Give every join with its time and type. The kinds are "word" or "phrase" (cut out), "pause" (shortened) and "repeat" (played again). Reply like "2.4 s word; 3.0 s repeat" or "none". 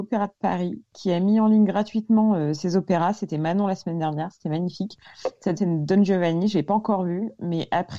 5.6 s word